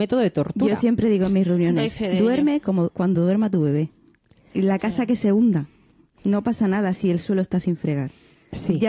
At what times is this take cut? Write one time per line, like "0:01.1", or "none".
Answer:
none